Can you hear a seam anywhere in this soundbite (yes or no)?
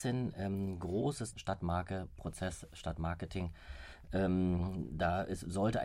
yes